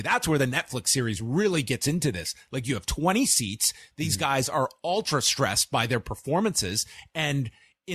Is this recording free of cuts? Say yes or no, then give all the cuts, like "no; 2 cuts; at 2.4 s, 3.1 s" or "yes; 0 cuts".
yes; 0 cuts